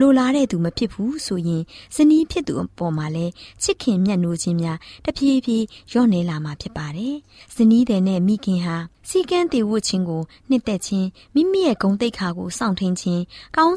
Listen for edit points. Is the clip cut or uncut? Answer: cut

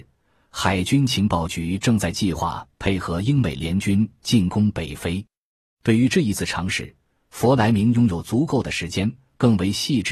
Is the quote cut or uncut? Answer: uncut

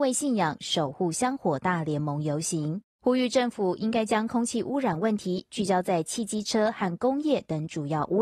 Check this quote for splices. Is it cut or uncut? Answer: cut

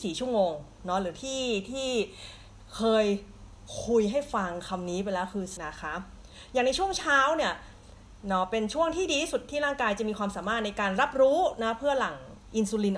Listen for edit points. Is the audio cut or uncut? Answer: cut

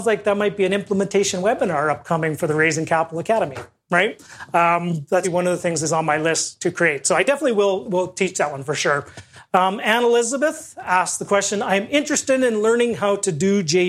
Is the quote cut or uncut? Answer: cut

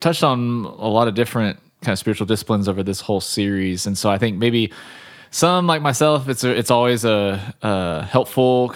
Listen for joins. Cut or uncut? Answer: uncut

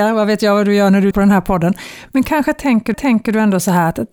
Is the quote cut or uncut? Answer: cut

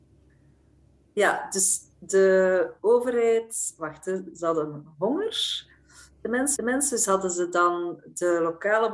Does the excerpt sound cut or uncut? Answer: cut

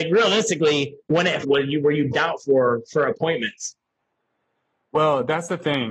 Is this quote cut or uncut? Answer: cut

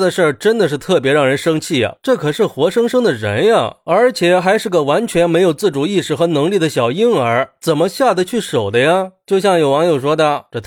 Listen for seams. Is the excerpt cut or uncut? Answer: uncut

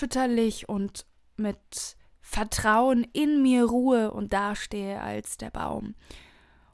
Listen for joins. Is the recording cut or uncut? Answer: uncut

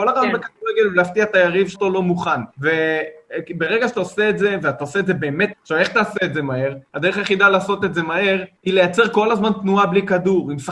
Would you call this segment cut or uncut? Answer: cut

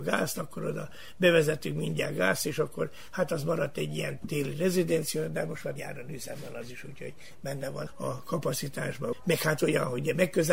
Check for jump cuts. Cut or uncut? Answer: cut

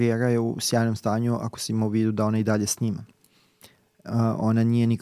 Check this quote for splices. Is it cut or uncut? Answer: uncut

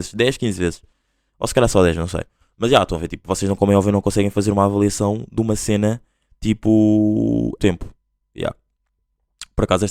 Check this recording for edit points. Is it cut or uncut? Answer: cut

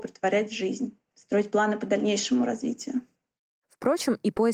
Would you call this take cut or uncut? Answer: uncut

